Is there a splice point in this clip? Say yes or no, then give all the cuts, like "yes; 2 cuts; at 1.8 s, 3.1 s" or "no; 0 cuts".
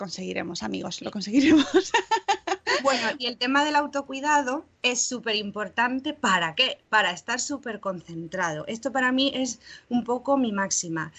yes; 1 cut; at 4.8 s